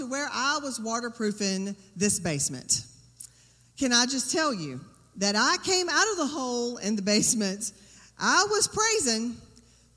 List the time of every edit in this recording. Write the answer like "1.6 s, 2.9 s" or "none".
none